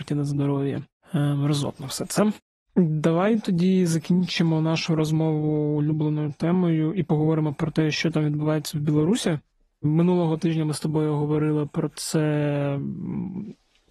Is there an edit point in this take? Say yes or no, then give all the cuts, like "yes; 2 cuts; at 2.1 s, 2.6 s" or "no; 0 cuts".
no; 0 cuts